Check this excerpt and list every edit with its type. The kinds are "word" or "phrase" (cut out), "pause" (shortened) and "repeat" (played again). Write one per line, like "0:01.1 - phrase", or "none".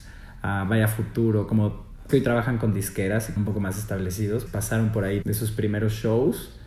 0:02.1 - word
0:03.4 - word
0:04.5 - word
0:05.2 - word

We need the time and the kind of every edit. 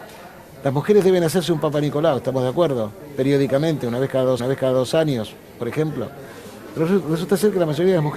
0:04.4 - repeat

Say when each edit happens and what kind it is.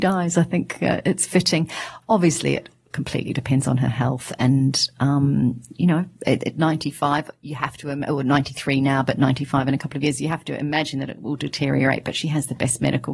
none

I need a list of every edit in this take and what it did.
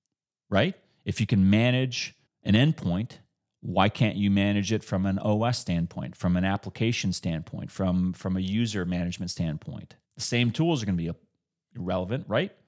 0:02.3 - pause
0:10.0 - pause

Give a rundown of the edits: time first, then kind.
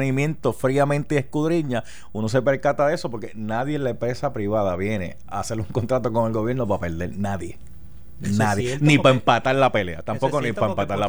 none

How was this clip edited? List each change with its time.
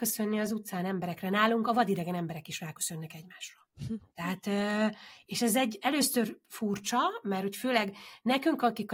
0:04.1 - pause

